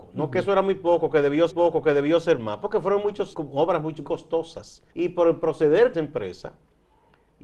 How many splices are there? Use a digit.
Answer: 5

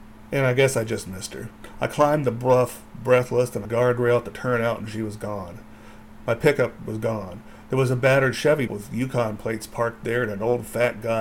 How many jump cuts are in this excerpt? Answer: 2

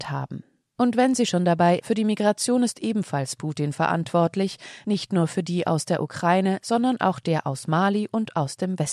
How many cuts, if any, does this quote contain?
1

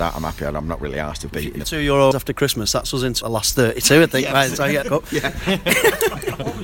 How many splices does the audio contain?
5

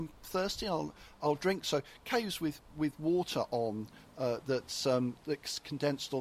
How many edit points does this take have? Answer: 0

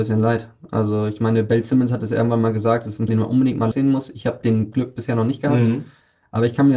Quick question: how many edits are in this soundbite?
3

